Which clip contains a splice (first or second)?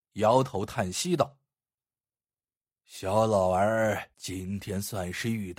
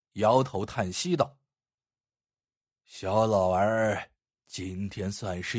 first